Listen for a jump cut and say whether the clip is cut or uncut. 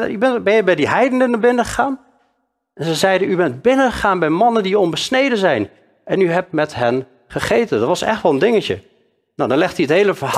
uncut